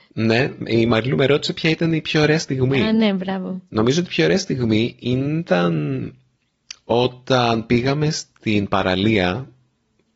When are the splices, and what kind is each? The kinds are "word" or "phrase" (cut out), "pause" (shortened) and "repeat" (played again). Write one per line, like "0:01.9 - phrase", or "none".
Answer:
0:03.7 - pause